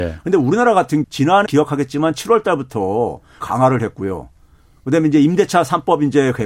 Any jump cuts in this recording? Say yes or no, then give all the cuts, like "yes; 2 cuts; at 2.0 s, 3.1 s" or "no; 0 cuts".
yes; 3 cuts; at 1.0 s, 1.5 s, 3.4 s